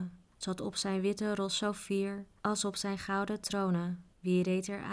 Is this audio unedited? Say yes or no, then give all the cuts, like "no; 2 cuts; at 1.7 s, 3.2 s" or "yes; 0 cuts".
yes; 0 cuts